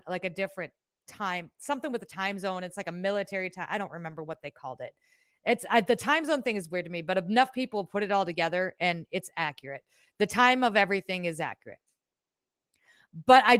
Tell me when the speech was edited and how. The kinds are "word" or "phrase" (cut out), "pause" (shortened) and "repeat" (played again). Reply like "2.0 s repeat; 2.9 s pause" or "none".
none